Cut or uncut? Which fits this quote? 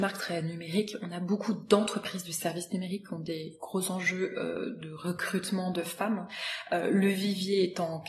uncut